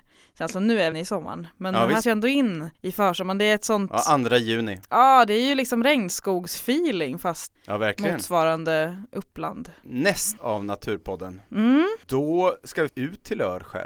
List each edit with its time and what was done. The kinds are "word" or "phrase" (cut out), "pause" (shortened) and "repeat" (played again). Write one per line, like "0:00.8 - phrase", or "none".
0:00.9 - phrase
0:02.0 - word
0:02.7 - pause
0:07.6 - word
0:10.4 - word
0:12.0 - pause
0:12.9 - word